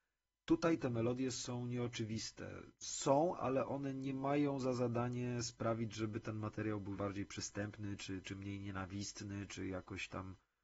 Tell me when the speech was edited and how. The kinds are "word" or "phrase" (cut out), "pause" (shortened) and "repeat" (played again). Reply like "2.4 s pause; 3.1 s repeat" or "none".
2.7 s pause; 7.0 s phrase; 8.2 s word